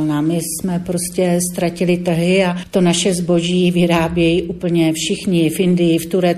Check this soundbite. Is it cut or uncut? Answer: uncut